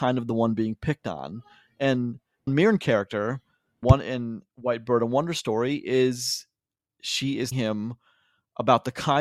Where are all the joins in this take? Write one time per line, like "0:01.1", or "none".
0:02.5
0:03.8
0:07.5